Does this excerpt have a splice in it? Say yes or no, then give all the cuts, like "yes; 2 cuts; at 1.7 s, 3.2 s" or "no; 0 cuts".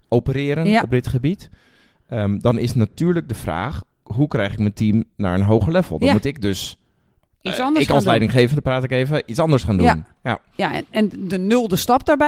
yes; 1 cut; at 3.9 s